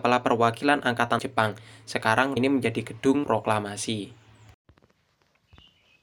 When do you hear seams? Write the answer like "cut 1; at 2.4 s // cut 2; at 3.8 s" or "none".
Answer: cut 1; at 1.2 s // cut 2; at 2.4 s // cut 3; at 3.2 s